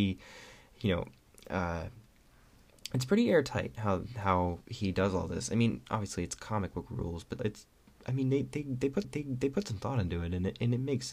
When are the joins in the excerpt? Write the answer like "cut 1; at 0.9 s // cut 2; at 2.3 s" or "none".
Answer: cut 1; at 7.4 s // cut 2; at 9.0 s